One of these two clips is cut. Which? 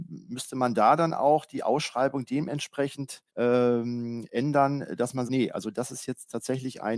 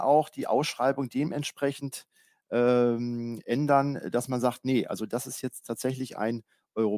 first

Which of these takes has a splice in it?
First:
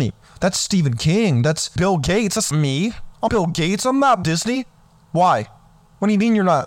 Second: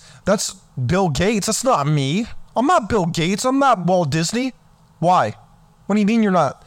first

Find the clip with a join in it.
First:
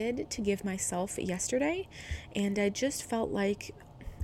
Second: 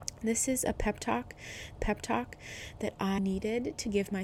second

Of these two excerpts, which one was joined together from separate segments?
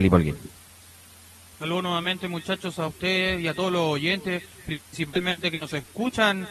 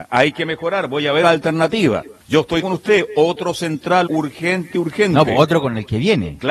second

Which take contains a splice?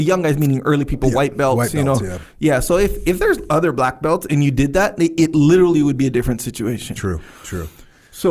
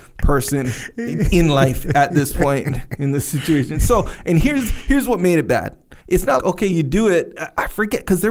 second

